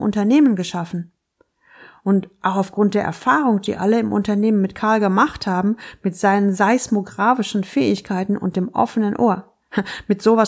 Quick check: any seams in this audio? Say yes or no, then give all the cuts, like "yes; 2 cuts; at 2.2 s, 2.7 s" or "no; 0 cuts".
no; 0 cuts